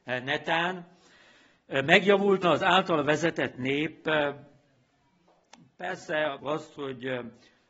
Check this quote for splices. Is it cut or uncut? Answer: cut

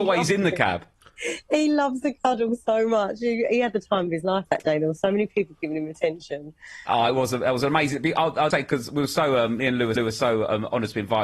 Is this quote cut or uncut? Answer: cut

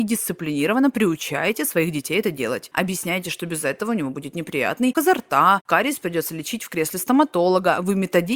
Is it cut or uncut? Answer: cut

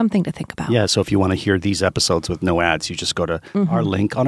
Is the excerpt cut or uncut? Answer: uncut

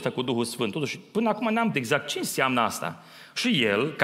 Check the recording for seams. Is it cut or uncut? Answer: cut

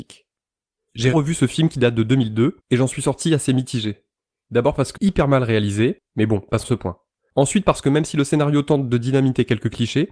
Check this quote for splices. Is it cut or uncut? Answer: cut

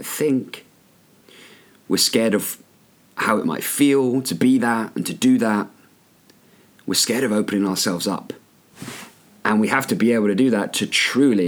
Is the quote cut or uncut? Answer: uncut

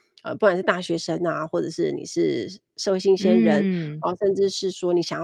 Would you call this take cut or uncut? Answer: uncut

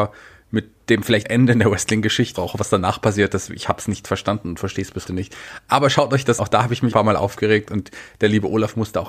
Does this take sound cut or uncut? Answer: cut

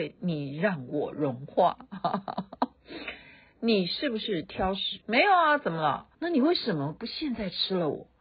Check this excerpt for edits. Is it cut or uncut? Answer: cut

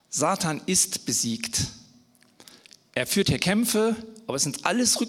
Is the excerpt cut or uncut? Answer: uncut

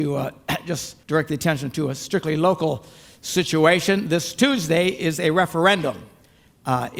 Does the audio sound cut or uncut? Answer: cut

